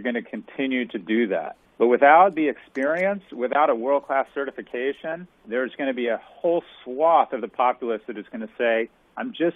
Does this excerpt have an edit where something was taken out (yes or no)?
yes